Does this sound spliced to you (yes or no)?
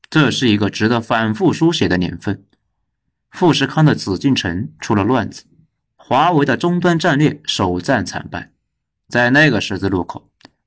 no